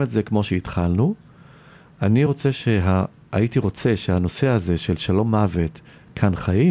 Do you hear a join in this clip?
no; 0 cuts

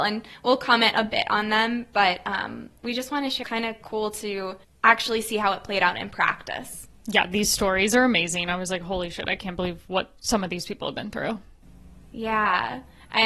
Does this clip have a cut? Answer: yes; 4 cuts; at 3.4 s, 4.6 s, 7.0 s, 10.2 s

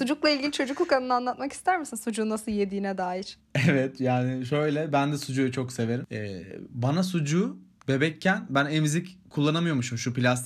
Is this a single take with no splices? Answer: yes; 0 cuts

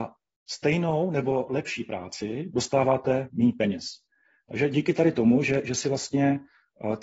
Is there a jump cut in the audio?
no; 0 cuts

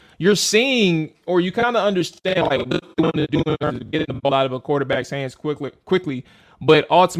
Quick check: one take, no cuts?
yes; 0 cuts

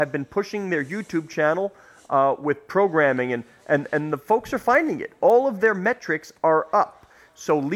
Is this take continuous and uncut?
yes; 0 cuts

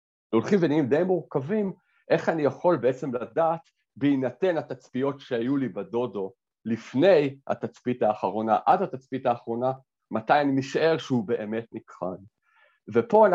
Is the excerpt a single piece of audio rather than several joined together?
yes; 0 cuts

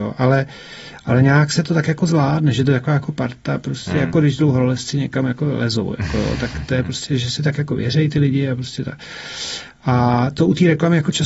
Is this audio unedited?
yes; 0 cuts

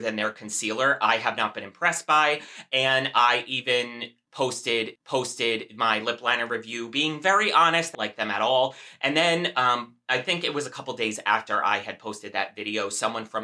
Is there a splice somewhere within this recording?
yes; 2 cuts; at 5.0 s, 7.9 s

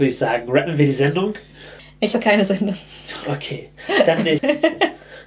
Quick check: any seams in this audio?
yes; 1 cut; at 2.1 s

